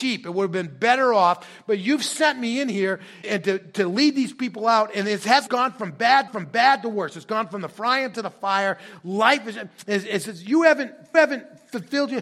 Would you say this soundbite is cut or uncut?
cut